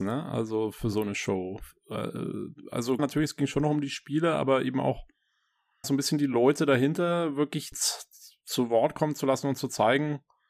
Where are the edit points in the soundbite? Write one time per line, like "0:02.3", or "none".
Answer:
0:03.0
0:05.8
0:07.7